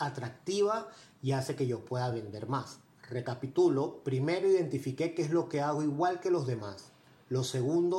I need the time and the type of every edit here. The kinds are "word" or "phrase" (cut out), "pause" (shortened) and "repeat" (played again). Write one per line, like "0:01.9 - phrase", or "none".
none